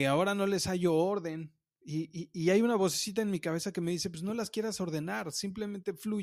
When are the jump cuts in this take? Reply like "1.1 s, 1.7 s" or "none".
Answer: none